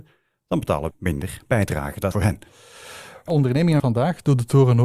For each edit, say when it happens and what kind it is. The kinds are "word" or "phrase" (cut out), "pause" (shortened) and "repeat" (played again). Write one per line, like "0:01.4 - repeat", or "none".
0:00.9 - word
0:02.1 - phrase
0:03.3 - word
0:03.8 - word

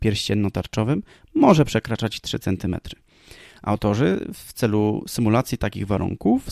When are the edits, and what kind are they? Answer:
none

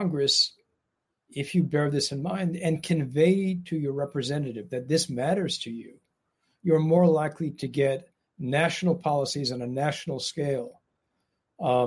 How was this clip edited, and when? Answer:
none

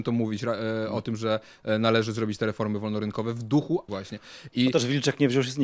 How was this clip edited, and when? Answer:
0:03.9 - word

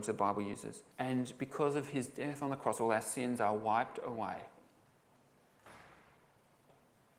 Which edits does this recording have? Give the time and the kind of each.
0:00.9 - pause

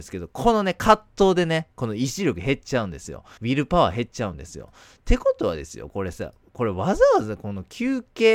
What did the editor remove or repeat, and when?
0:03.4 - pause

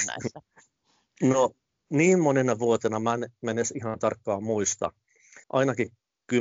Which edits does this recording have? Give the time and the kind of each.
0:05.4 - pause

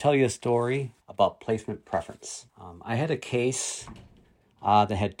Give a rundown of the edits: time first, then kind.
0:01.0 - pause
0:02.5 - pause

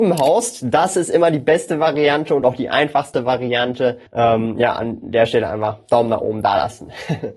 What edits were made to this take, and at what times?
0:04.1 - pause

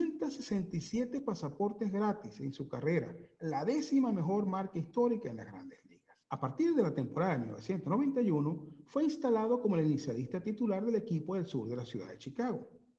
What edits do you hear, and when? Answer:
0:06.2 - pause

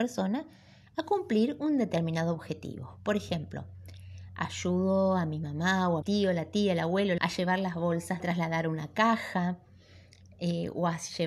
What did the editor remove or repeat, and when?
0:06.0 - phrase
0:07.2 - word
0:08.2 - phrase

